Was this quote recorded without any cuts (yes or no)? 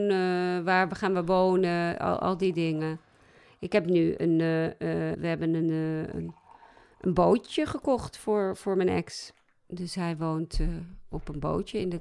no